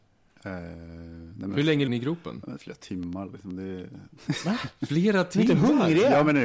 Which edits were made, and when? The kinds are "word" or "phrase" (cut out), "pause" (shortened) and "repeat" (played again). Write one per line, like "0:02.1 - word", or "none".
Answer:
0:01.9 - word